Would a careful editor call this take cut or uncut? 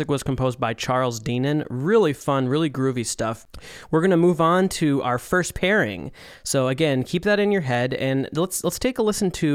uncut